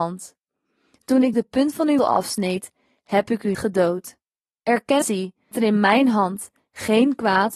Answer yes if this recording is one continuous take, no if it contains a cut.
no